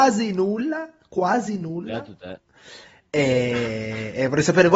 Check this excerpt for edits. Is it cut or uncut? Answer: uncut